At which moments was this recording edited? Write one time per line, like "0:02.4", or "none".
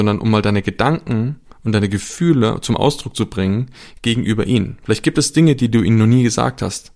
none